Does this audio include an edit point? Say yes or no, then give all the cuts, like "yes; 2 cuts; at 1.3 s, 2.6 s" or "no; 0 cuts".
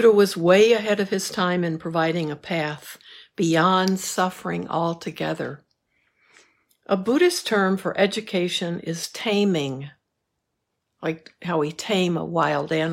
no; 0 cuts